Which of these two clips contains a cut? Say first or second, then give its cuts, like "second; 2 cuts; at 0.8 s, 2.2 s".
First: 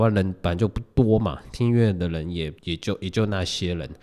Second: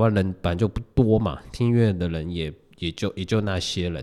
first; 1 cut; at 2.6 s